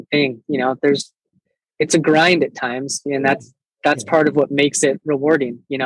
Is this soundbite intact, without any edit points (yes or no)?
yes